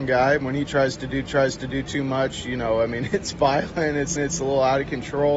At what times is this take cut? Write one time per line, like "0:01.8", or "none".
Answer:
0:01.2
0:04.2